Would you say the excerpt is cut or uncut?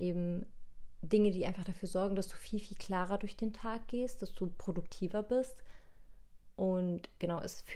uncut